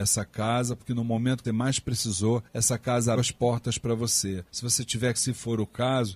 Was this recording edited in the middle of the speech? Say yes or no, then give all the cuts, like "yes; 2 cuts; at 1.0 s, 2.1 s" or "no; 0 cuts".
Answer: yes; 5 cuts; at 1.4 s, 2.5 s, 3.2 s, 4.5 s, 5.1 s